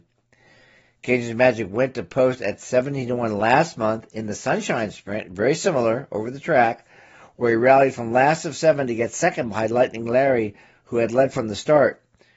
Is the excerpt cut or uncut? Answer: uncut